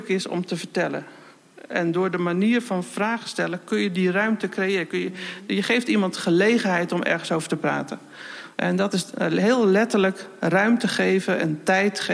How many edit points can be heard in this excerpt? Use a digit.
0